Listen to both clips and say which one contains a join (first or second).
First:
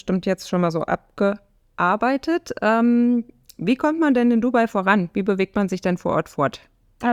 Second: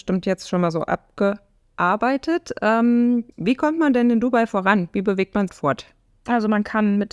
second